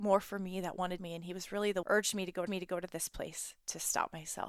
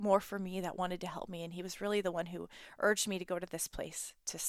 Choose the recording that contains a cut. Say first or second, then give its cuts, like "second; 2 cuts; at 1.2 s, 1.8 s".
first; 3 cuts; at 1.0 s, 1.8 s, 2.5 s